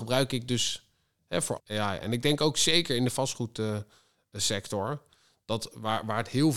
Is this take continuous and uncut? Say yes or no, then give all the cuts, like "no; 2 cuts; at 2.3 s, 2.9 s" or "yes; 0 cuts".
no; 1 cut; at 1.6 s